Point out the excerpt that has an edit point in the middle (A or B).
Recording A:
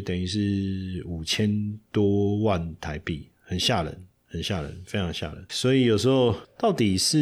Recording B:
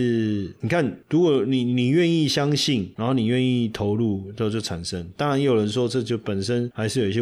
A